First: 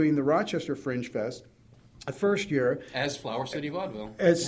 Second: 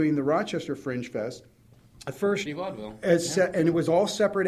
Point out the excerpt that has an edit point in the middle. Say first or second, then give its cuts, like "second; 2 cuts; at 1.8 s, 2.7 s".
second; 1 cut; at 2.5 s